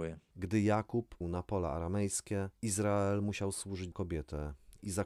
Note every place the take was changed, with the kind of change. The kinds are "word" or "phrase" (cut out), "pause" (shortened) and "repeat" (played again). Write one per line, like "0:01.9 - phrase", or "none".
0:01.2 - word
0:02.5 - pause
0:03.9 - word